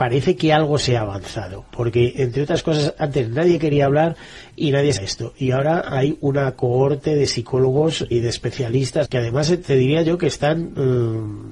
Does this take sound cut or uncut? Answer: cut